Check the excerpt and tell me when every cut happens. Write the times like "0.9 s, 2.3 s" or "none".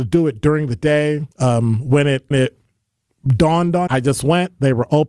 1.3 s, 2.3 s, 3.9 s